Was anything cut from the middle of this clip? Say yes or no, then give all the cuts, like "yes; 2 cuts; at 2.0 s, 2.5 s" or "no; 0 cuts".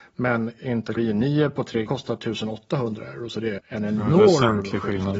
yes; 3 cuts; at 1.0 s, 1.9 s, 3.6 s